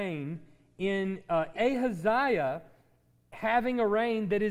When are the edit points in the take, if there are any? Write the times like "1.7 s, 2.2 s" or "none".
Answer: 1.5 s